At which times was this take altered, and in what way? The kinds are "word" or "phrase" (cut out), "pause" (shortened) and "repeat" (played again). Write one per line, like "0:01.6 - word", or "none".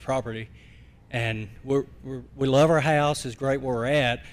none